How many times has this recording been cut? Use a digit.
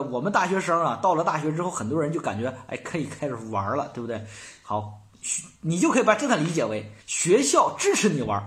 1